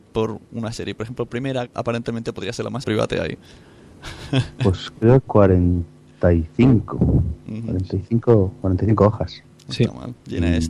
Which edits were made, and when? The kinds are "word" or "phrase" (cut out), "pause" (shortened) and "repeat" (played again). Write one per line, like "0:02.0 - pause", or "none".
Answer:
0:01.3 - word
0:01.7 - word
0:02.8 - word
0:05.3 - word